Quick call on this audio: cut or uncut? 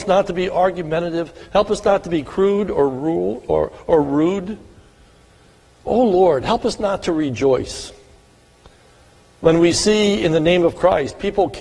uncut